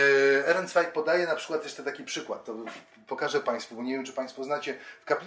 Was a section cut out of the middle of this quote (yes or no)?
no